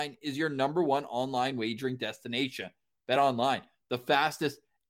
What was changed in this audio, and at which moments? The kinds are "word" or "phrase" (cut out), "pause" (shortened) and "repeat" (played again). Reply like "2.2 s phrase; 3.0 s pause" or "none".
none

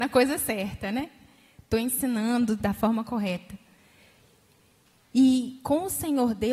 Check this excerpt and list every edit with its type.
none

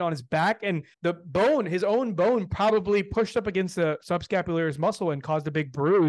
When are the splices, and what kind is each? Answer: 0.9 s pause

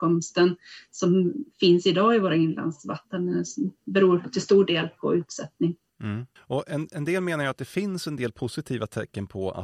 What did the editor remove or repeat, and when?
6.4 s pause

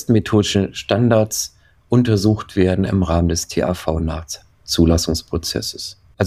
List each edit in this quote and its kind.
none

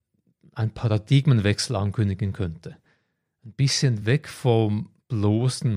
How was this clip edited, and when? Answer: none

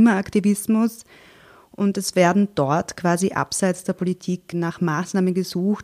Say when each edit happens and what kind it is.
none

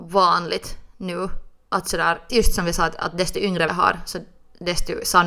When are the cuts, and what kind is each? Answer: 2.3 s word; 3.7 s word

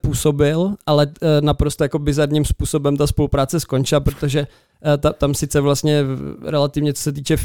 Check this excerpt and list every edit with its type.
none

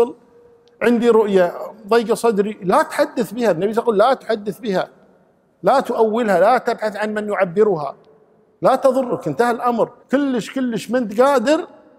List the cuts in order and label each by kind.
10.0 s pause

